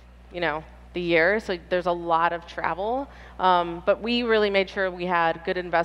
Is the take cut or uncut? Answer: uncut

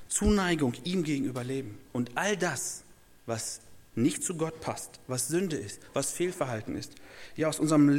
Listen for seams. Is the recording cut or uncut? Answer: uncut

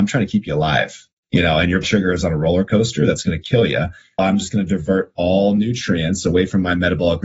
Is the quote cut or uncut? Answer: cut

